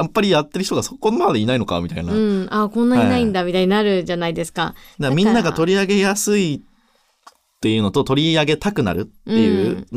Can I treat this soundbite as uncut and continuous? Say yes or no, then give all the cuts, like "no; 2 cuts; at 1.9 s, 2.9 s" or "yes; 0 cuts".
yes; 0 cuts